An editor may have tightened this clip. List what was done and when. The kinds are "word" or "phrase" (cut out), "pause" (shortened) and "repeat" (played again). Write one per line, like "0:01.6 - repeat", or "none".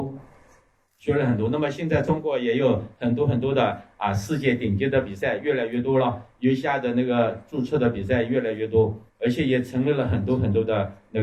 0:09.1 - pause